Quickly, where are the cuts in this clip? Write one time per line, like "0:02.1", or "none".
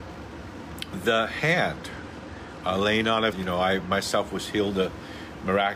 0:03.3